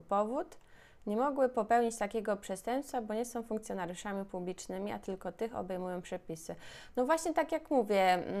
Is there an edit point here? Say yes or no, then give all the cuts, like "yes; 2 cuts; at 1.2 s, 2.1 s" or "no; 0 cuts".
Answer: no; 0 cuts